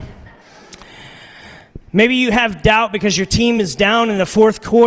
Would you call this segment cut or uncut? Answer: uncut